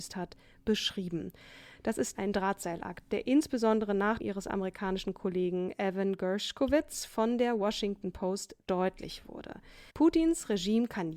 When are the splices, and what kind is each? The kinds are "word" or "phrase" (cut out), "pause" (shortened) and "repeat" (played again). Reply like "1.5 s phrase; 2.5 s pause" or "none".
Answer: 2.1 s word; 4.2 s phrase; 9.9 s pause